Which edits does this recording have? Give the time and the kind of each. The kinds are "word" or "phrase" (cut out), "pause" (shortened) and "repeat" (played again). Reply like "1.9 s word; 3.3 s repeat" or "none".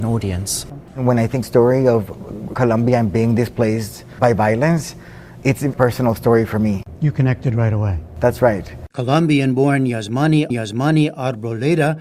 1.4 s phrase; 2.5 s phrase; 5.7 s word; 8.9 s pause; 10.5 s repeat